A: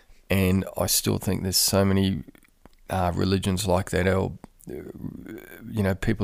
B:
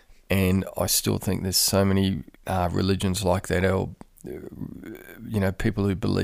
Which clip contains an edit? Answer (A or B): B